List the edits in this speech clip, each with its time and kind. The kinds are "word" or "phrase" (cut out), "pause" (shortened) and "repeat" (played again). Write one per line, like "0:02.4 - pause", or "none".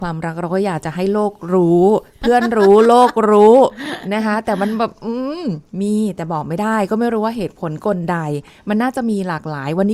none